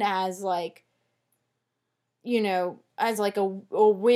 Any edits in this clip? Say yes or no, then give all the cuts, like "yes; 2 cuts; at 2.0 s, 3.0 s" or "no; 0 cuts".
no; 0 cuts